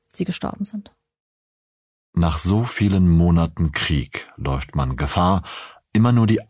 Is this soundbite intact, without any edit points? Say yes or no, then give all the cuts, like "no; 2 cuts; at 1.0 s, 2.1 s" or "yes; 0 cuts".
yes; 0 cuts